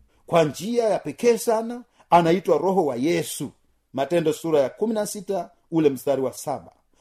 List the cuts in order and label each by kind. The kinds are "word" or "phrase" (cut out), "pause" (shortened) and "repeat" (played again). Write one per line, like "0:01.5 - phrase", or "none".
none

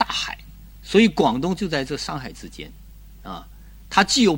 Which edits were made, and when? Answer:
none

